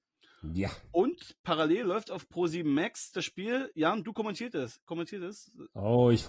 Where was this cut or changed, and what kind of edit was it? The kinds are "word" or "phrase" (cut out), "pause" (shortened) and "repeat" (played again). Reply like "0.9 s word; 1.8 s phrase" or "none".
none